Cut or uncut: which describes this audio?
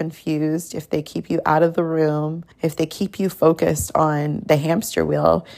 cut